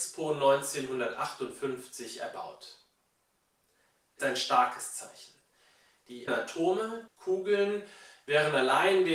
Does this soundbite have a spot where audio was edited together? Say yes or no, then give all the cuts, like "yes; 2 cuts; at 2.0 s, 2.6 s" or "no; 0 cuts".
yes; 3 cuts; at 4.2 s, 6.3 s, 7.1 s